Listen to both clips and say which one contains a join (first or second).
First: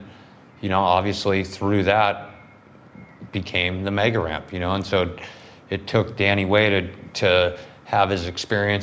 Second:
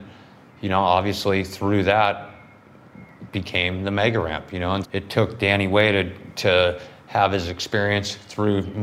second